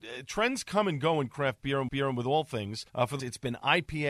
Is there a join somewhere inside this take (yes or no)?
yes